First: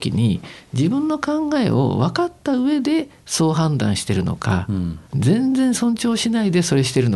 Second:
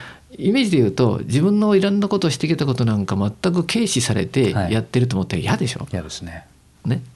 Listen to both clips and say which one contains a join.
first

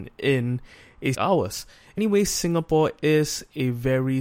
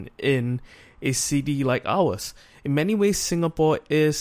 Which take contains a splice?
first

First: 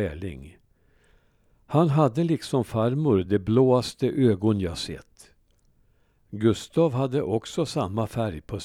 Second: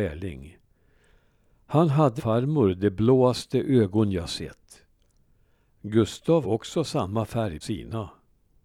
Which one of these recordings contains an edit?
second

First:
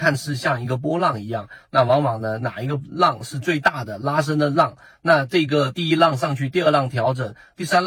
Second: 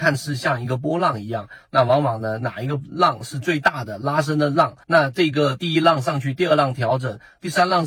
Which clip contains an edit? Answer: second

